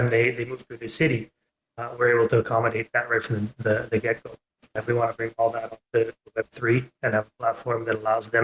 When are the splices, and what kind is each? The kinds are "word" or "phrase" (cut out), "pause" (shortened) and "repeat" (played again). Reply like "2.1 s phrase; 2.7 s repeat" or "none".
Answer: none